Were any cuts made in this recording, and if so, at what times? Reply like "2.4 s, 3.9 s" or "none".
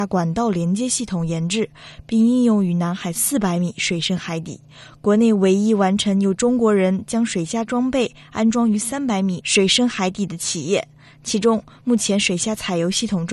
none